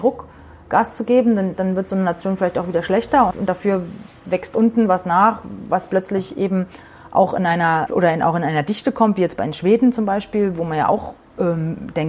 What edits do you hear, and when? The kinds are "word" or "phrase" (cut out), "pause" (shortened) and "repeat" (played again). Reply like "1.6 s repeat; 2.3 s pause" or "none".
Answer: 3.3 s word; 7.9 s phrase